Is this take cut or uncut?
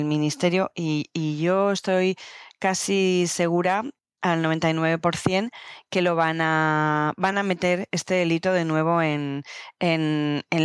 uncut